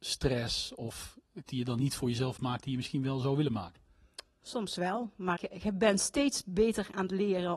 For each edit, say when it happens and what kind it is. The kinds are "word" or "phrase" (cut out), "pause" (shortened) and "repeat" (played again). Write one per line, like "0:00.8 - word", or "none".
0:01.5 - word
0:05.4 - word